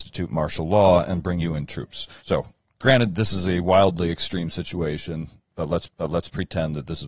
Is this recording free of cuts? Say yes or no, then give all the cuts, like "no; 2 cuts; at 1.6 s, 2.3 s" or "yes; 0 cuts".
no; 3 cuts; at 1.4 s, 2.2 s, 5.9 s